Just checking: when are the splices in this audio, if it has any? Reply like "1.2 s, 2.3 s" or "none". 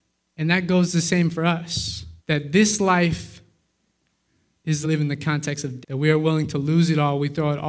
2.2 s, 4.8 s, 5.8 s